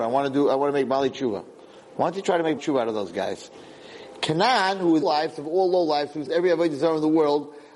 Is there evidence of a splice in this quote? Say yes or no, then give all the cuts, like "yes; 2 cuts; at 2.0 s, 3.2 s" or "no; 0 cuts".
yes; 3 cuts; at 2.6 s, 5.0 s, 6.3 s